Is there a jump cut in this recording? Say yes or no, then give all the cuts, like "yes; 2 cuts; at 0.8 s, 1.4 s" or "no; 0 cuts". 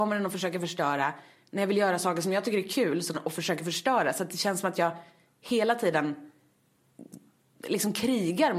yes; 1 cut; at 3.1 s